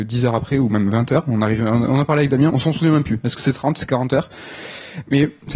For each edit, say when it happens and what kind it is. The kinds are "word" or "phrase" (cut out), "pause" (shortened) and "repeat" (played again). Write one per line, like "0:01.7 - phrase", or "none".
0:02.5 - word